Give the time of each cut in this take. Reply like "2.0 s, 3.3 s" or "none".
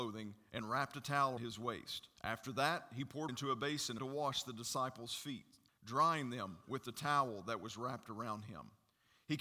1.4 s, 2.2 s, 3.3 s, 4.0 s, 5.7 s